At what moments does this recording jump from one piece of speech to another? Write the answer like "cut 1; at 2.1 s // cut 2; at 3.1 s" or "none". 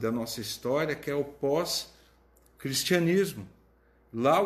none